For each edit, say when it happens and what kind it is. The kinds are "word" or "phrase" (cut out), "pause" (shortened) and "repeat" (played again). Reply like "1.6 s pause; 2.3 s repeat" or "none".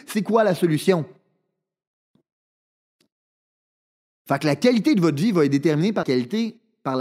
6.0 s word